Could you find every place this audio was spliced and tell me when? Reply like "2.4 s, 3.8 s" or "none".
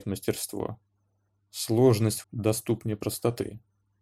2.2 s